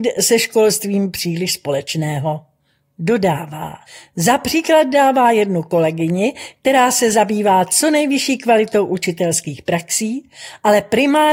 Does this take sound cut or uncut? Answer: cut